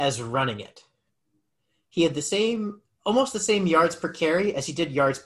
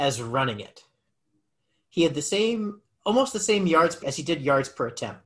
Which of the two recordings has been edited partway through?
second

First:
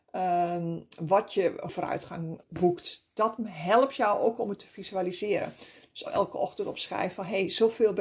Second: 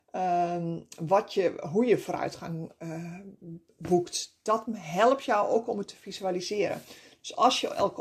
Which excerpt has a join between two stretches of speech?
first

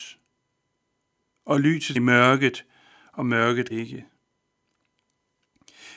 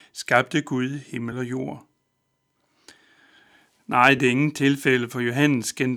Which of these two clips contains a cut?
first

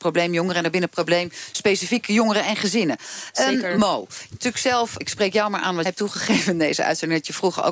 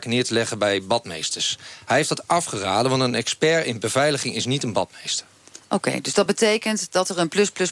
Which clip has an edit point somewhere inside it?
first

